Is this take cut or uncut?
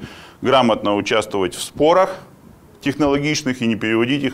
uncut